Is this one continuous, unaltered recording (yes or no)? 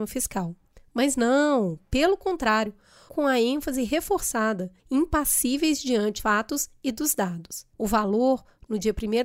no